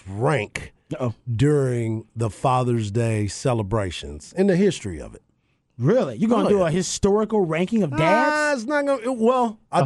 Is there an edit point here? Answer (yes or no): no